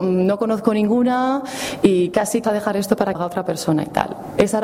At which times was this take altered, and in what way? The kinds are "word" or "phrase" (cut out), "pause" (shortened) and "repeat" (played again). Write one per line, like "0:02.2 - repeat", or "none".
0:02.4 - word
0:03.1 - phrase